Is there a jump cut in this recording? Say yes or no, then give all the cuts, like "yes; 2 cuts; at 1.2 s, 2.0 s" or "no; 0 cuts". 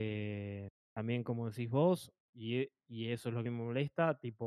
yes; 2 cuts; at 2.2 s, 3.5 s